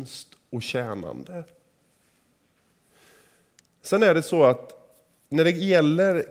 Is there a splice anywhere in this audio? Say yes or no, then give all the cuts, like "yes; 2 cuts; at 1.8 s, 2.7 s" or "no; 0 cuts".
no; 0 cuts